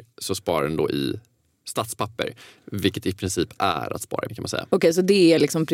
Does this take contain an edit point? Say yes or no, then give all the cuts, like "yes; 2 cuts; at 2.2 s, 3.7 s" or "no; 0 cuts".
yes; 1 cut; at 4.3 s